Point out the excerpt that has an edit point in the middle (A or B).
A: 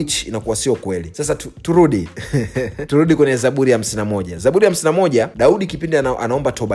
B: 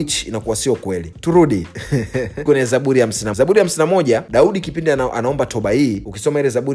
B